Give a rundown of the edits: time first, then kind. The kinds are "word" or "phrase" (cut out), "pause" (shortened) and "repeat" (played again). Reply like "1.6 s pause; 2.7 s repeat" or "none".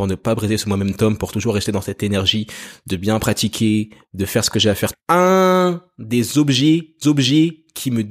4.9 s phrase; 7.0 s repeat